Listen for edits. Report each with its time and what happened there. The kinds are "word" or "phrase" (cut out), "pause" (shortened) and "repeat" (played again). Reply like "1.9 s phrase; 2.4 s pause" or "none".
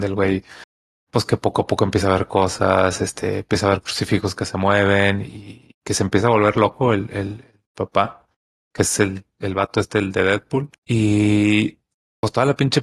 7.6 s pause; 10.8 s pause